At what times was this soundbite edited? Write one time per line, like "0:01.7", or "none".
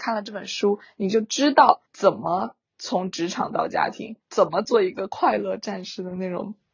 0:01.9
0:04.2